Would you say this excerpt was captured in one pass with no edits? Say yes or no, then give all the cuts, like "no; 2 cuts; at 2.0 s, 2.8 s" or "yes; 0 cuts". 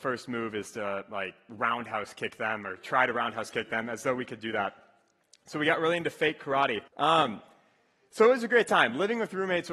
no; 1 cut; at 6.9 s